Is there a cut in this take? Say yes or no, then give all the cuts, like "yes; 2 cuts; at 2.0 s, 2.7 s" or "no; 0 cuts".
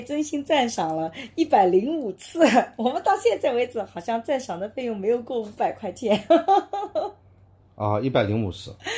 no; 0 cuts